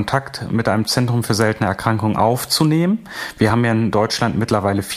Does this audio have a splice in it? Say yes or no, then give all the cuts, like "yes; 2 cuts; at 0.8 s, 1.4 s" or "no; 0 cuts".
no; 0 cuts